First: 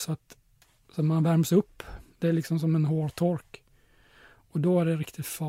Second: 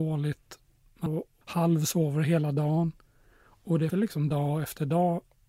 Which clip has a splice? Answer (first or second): second